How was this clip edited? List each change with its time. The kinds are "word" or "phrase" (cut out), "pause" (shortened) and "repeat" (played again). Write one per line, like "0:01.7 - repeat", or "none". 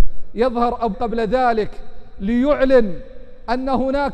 0:00.9 - word